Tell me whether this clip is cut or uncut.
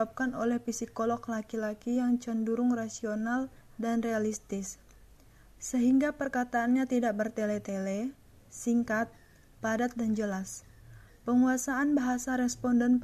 cut